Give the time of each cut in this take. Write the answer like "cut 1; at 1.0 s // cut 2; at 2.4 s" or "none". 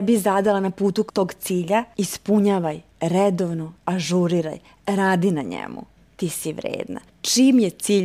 cut 1; at 1.1 s // cut 2; at 3.8 s // cut 3; at 6.0 s